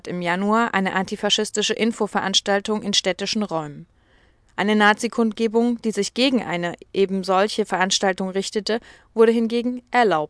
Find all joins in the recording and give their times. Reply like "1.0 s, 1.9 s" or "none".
none